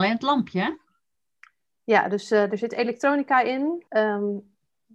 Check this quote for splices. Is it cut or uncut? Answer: cut